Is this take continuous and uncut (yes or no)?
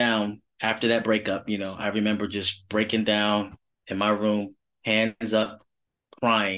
yes